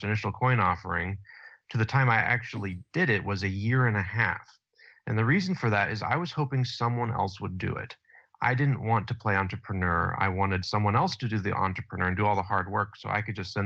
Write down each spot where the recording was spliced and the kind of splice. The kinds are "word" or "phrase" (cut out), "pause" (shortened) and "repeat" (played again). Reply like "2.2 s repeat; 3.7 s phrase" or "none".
none